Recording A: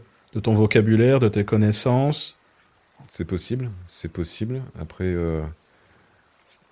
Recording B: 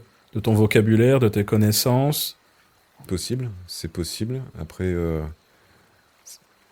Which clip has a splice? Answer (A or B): B